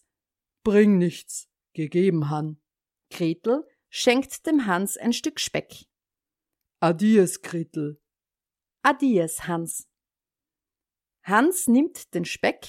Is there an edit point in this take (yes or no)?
yes